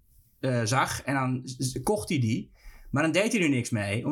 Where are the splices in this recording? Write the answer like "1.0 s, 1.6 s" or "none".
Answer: none